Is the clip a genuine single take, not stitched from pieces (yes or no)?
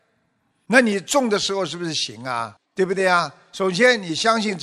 no